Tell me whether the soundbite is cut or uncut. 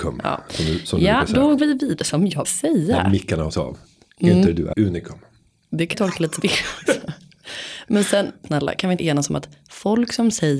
cut